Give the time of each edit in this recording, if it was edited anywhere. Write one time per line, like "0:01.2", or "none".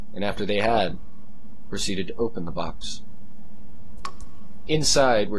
none